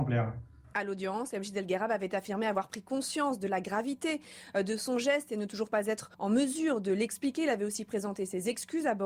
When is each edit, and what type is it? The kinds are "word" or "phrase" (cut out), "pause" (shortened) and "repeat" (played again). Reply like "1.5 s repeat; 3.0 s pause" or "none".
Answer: 6.1 s pause